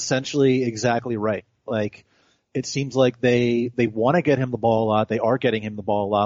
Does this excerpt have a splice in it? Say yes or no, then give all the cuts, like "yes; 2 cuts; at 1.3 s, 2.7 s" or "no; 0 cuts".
no; 0 cuts